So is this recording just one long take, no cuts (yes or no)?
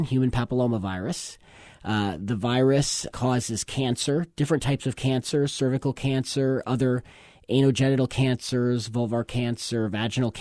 no